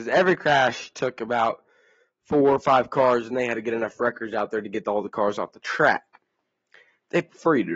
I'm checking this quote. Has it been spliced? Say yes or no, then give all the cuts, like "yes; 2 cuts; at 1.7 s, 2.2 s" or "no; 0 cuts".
no; 0 cuts